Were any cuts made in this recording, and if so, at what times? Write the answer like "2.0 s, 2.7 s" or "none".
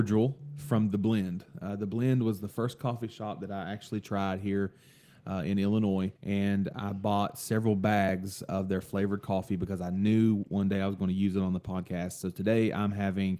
6.2 s